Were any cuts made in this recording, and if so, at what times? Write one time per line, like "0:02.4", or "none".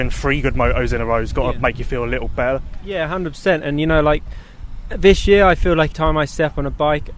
0:05.9